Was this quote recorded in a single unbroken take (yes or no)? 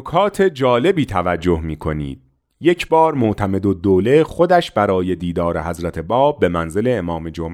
yes